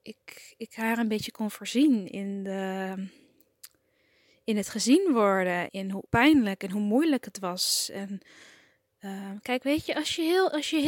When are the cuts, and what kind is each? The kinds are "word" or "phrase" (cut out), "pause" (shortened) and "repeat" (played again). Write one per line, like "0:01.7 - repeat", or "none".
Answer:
0:05.7 - word
0:06.1 - word